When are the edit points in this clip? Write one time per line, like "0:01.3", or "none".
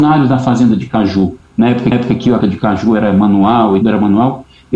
0:01.4
0:01.9
0:02.4
0:03.8